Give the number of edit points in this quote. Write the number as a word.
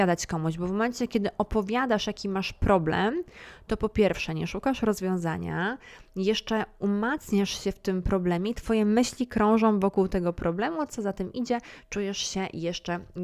zero